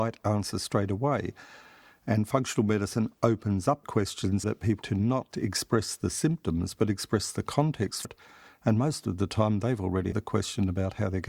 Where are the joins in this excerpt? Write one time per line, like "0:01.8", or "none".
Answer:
0:03.8
0:04.4
0:04.8
0:05.3
0:08.0
0:10.1